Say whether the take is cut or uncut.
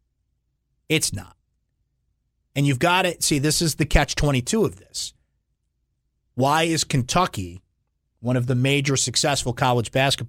uncut